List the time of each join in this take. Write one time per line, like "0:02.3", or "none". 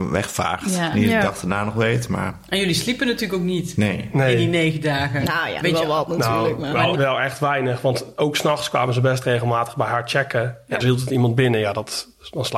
0:05.6
0:06.9
0:10.8